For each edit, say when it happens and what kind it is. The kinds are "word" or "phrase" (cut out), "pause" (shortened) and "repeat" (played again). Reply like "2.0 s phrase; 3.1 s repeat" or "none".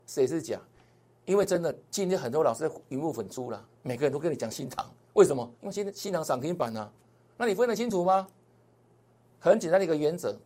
3.7 s pause; 5.6 s pause

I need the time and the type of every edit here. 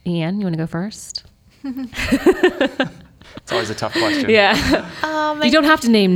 none

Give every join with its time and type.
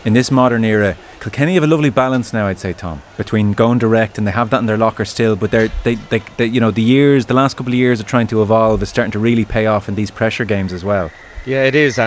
1.2 s pause

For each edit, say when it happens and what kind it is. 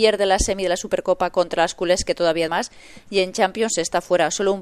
2.5 s word

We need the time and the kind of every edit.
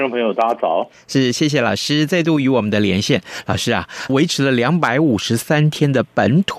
4.1 s word

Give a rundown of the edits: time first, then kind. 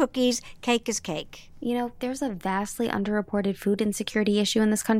none

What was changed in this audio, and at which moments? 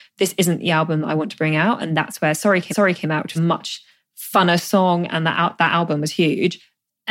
2.7 s repeat; 3.4 s phrase

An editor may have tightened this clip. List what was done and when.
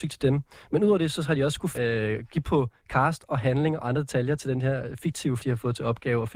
1.7 s word; 2.4 s word; 5.4 s word

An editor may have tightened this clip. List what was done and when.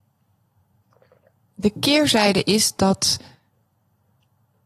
none

